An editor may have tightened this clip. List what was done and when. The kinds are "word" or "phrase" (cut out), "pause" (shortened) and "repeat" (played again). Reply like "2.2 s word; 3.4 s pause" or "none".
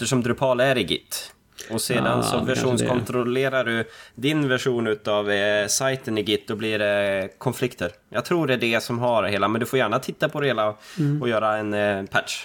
none